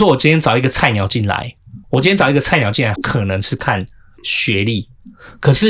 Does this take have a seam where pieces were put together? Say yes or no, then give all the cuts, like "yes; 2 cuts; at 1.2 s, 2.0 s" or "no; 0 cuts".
yes; 2 cuts; at 1.8 s, 3.0 s